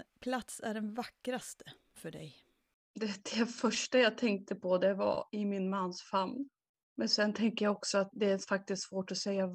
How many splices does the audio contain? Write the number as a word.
one